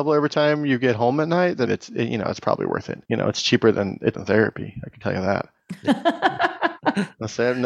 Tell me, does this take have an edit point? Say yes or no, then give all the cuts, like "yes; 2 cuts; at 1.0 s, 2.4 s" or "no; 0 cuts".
yes; 3 cuts; at 1.7 s, 3.0 s, 4.1 s